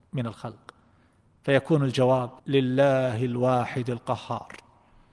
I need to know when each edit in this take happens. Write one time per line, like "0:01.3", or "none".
0:02.4

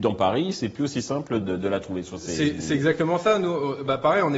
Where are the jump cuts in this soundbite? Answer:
0:01.4

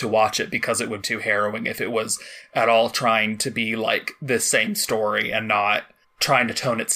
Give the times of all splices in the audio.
0:01.0
0:06.0

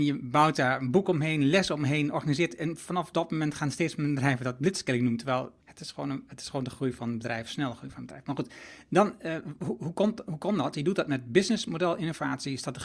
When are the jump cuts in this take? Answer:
0:05.6

